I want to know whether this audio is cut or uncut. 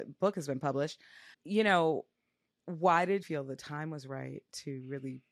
cut